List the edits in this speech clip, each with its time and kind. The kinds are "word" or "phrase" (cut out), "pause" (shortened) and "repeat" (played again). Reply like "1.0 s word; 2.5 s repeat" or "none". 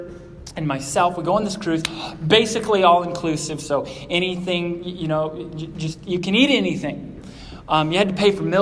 none